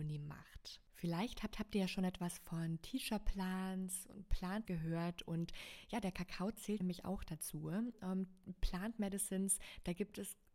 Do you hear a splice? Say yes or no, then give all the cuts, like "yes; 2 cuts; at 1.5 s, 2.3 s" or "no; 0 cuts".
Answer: yes; 3 cuts; at 1.5 s, 4.7 s, 6.8 s